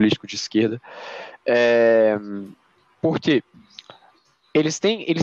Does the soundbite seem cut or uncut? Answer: uncut